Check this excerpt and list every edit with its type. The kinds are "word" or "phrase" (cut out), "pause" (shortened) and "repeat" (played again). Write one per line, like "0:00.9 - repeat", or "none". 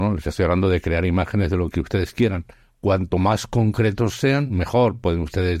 none